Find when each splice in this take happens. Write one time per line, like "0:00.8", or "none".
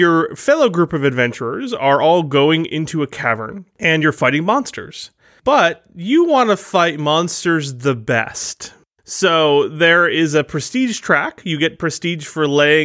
none